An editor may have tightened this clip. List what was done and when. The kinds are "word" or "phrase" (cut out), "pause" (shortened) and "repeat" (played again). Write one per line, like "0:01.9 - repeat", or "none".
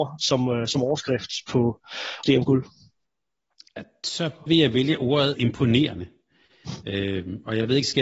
0:02.2 - word
0:04.5 - word
0:05.4 - word